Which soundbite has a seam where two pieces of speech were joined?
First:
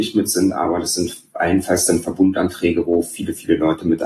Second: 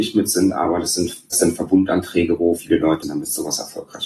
second; 3 cuts; at 1.3 s, 2.6 s, 3.0 s

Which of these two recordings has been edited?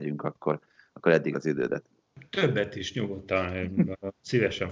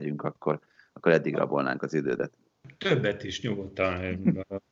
first; 1 cut; at 1.3 s

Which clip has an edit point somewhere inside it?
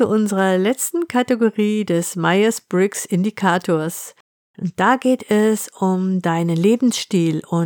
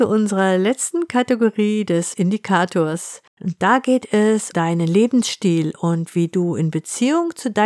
second; 3 cuts; at 2.1 s, 3.3 s, 4.5 s

